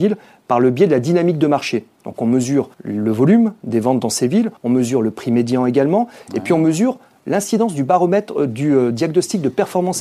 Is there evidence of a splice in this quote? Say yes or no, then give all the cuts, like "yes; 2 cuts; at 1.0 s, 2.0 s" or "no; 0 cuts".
yes; 2 cuts; at 2.7 s, 4.6 s